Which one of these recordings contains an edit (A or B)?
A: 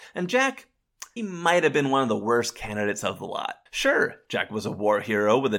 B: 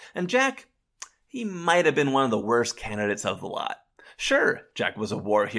A